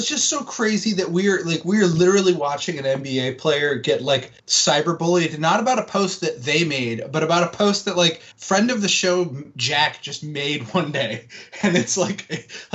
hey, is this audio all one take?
no; 2 cuts; at 4.4 s, 8.3 s

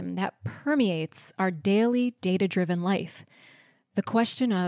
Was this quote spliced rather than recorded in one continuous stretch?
no; 0 cuts

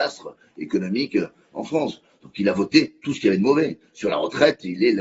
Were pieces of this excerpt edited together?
no; 0 cuts

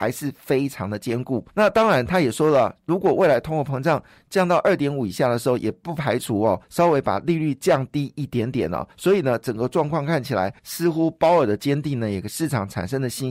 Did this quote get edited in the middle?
yes; 4 cuts; at 1.5 s, 6.6 s, 8.9 s, 10.6 s

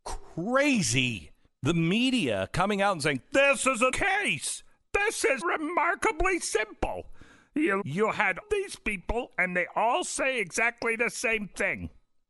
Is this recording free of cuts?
no; 5 cuts; at 1.5 s, 3.9 s, 5.4 s, 7.8 s, 8.4 s

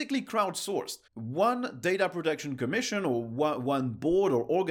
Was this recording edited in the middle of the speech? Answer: yes; 1 cut; at 1.1 s

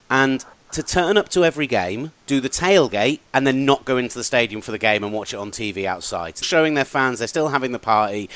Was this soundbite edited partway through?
yes; 3 cuts; at 2.2 s, 3.3 s, 6.4 s

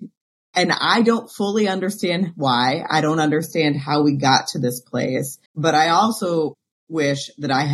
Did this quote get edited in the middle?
yes; 1 cut; at 5.5 s

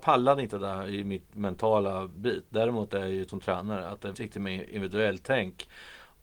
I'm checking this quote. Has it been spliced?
yes; 2 cuts; at 3.3 s, 4.1 s

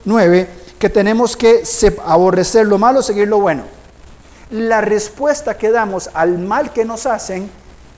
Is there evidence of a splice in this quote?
no; 0 cuts

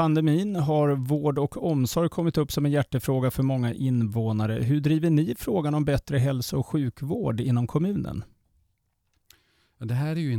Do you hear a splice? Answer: no; 0 cuts

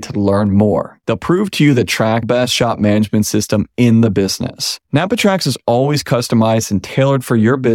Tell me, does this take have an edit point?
yes; 3 cuts; at 1.0 s, 2.2 s, 4.8 s

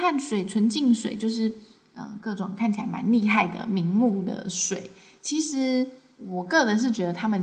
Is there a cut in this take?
no; 0 cuts

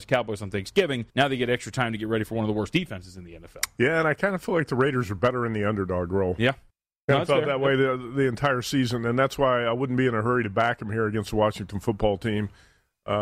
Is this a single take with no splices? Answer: no; 2 cuts; at 1.1 s, 6.7 s

